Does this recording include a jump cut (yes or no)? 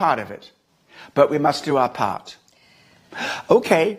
no